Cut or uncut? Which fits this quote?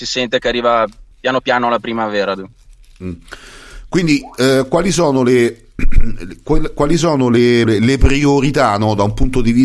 cut